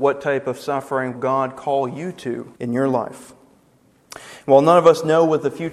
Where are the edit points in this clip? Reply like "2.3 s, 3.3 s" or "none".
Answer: 1.2 s, 2.6 s